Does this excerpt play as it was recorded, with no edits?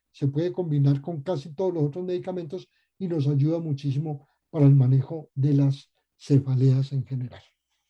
yes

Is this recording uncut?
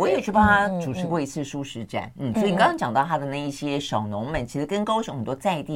yes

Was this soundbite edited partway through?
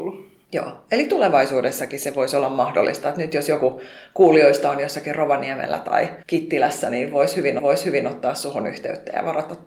yes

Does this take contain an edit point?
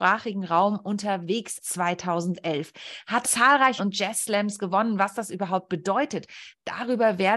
yes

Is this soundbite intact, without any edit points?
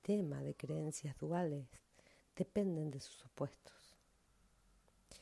yes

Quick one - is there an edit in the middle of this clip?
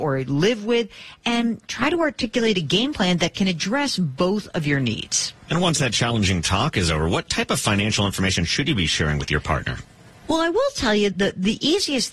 yes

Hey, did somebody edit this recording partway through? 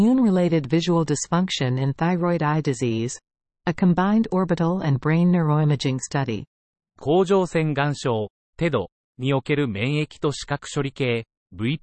no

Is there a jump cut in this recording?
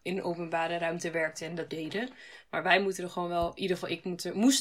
yes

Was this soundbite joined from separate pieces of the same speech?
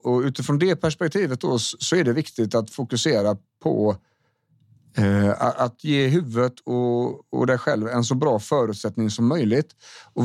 no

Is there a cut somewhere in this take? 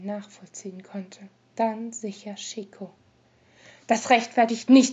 yes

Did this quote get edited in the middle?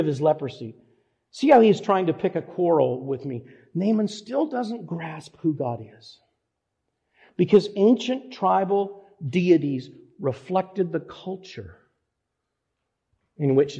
no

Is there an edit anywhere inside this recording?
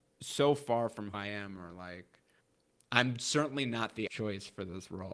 yes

